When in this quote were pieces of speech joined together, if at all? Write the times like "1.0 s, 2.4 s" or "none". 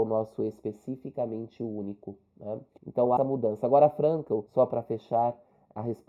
3.2 s, 4.5 s